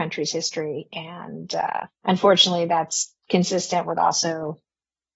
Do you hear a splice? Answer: yes; 1 cut; at 1.9 s

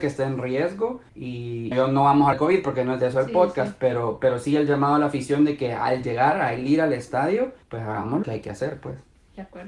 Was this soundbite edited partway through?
yes; 5 cuts; at 1.1 s, 1.7 s, 2.3 s, 7.6 s, 8.2 s

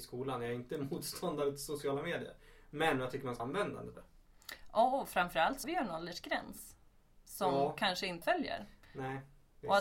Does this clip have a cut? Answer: yes; 4 cuts; at 3.4 s, 3.9 s, 5.6 s, 8.2 s

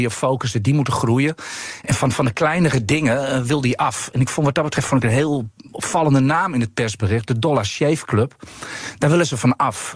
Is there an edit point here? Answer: no; 0 cuts

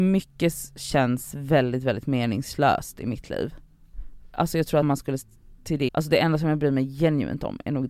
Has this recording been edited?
yes; 2 cuts; at 4.8 s, 5.9 s

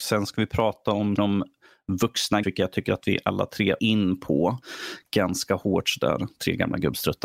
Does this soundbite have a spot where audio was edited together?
yes; 3 cuts; at 1.2 s, 2.4 s, 3.8 s

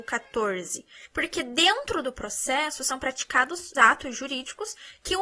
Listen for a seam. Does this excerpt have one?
yes; 1 cut; at 3.7 s

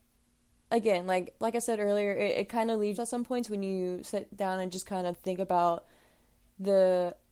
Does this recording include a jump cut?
yes; 1 cut; at 3.0 s

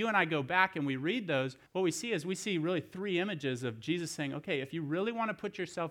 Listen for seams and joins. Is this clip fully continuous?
no; 1 cut; at 1.7 s

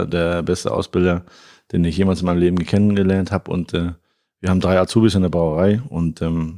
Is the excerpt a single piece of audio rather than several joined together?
yes; 0 cuts

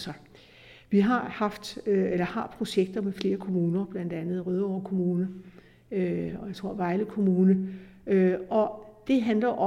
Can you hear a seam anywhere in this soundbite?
no; 0 cuts

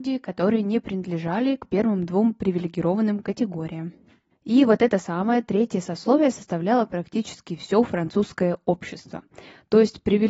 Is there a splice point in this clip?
no; 0 cuts

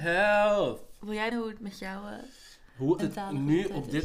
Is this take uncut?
no; 2 cuts; at 1.3 s, 3.0 s

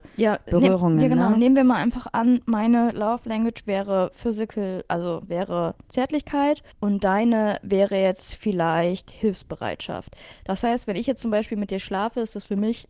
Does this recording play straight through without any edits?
no; 1 cut; at 6.7 s

